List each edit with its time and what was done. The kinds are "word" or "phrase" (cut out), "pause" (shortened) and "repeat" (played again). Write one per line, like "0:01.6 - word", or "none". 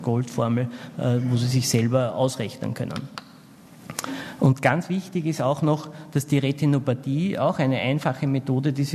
none